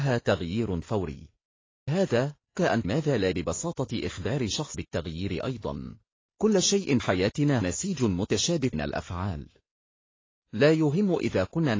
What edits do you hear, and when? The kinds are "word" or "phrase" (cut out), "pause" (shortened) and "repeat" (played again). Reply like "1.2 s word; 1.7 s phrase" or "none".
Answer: 1.9 s word; 2.5 s word; 2.8 s word; 3.3 s word; 4.7 s word; 6.1 s pause; 7.0 s word; 7.6 s word; 8.7 s word